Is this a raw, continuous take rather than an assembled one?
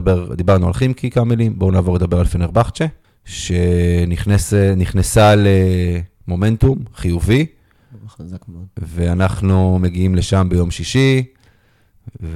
no; 1 cut; at 3.0 s

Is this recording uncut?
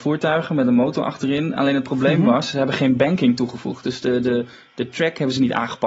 yes; 0 cuts

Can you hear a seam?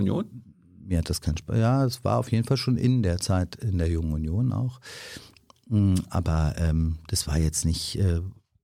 no; 0 cuts

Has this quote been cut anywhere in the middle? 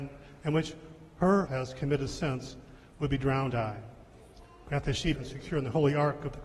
yes; 3 cuts; at 1.5 s, 3.5 s, 5.1 s

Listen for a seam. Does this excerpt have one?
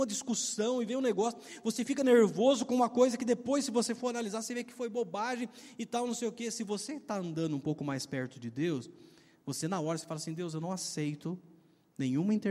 no; 0 cuts

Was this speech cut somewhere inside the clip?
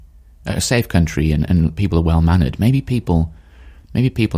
no; 0 cuts

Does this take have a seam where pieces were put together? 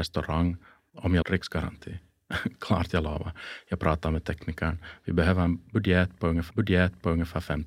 yes; 2 cuts; at 1.2 s, 6.5 s

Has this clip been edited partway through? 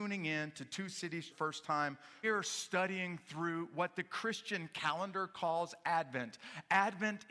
yes; 2 cuts; at 1.3 s, 2.2 s

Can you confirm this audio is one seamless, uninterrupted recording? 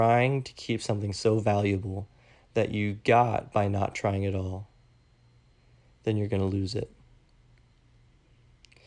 yes; 0 cuts

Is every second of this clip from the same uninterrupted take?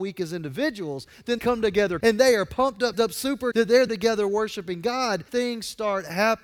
no; 6 cuts; at 1.4 s, 2.0 s, 2.9 s, 3.5 s, 3.9 s, 5.3 s

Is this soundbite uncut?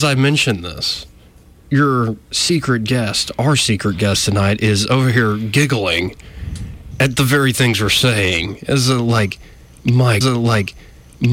no; 1 cut; at 10.2 s

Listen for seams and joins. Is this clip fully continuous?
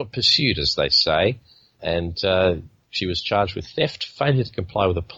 yes; 0 cuts

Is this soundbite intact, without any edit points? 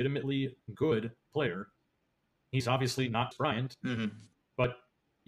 no; 2 cuts; at 1.3 s, 3.3 s

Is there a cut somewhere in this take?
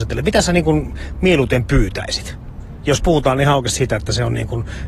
no; 0 cuts

